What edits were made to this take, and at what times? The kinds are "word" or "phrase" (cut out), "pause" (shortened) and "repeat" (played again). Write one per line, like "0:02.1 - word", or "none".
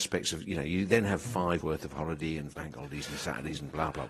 0:01.6 - word